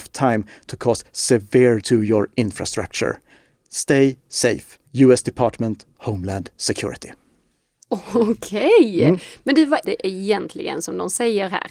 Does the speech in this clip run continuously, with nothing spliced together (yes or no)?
no